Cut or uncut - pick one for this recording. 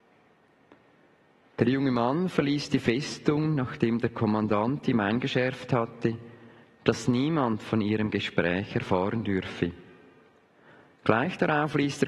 uncut